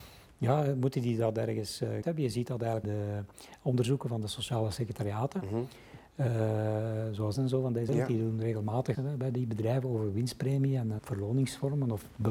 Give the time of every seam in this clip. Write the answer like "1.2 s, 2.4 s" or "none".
2.0 s, 2.8 s, 7.3 s, 7.9 s, 8.9 s, 11.0 s